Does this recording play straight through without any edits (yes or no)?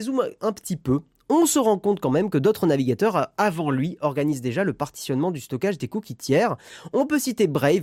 yes